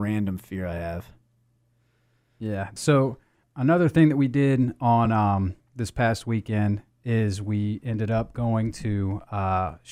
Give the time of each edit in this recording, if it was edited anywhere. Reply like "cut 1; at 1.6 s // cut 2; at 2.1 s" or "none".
none